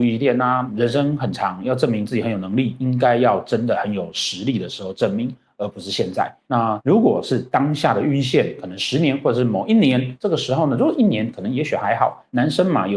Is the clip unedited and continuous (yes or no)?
yes